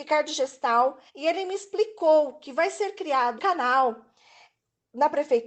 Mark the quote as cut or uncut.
cut